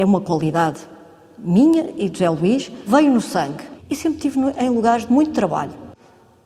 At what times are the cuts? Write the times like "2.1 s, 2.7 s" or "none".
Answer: none